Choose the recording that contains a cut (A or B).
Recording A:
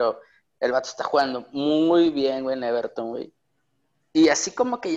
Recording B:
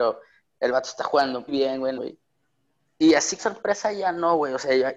B